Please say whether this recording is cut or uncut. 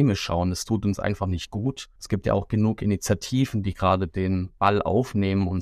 uncut